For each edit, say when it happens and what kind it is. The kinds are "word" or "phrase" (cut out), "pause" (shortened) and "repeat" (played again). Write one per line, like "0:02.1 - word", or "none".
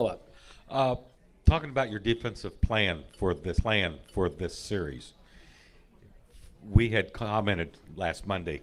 0:01.2 - pause
0:03.6 - repeat